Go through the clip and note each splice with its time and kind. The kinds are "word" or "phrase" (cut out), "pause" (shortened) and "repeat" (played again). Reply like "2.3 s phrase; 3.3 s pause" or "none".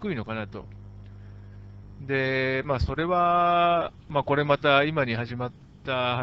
none